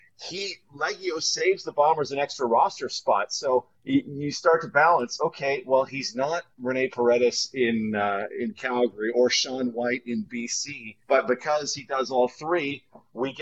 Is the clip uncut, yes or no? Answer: no